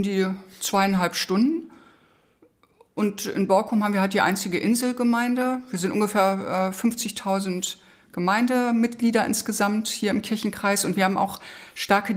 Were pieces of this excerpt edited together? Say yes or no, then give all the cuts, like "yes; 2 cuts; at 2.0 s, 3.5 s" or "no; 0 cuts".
no; 0 cuts